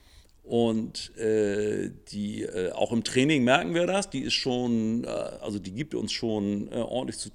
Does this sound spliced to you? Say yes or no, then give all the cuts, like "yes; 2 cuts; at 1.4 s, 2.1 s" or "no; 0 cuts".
no; 0 cuts